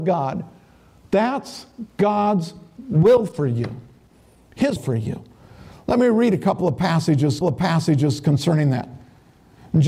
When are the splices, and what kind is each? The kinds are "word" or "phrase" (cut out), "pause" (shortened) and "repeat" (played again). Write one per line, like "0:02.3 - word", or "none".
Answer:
0:04.8 - word
0:07.4 - repeat